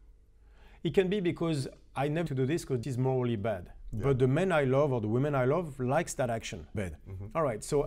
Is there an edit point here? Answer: yes; 3 cuts; at 2.3 s, 2.8 s, 6.7 s

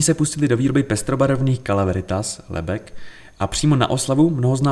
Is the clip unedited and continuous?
yes; 0 cuts

